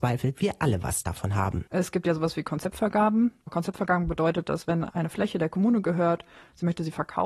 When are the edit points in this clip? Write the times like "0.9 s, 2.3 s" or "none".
1.7 s